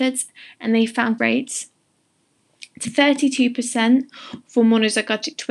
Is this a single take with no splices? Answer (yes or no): no